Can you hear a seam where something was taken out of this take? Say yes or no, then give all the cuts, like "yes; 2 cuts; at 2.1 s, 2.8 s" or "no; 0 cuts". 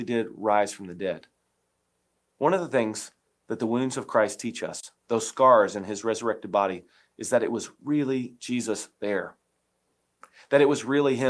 no; 0 cuts